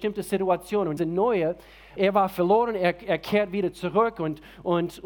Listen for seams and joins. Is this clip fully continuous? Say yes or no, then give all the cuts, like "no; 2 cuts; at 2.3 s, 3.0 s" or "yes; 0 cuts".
no; 2 cuts; at 1.0 s, 2.0 s